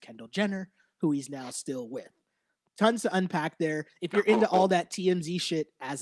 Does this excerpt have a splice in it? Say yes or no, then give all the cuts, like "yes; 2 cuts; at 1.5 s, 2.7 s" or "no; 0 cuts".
no; 0 cuts